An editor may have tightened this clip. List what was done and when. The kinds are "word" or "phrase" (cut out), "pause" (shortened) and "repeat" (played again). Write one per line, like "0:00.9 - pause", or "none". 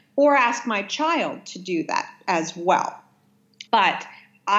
0:03.7 - pause